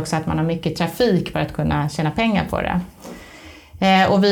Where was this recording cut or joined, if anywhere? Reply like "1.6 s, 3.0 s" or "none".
1.3 s